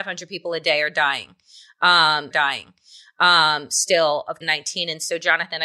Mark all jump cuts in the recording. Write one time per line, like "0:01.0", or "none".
0:02.3
0:04.4